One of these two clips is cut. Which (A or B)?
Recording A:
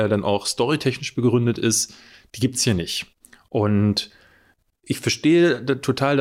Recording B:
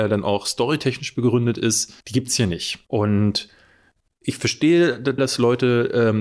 B